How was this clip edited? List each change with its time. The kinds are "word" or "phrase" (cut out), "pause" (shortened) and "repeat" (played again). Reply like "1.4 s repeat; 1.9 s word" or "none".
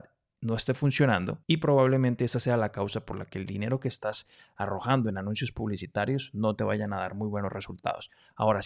1.4 s pause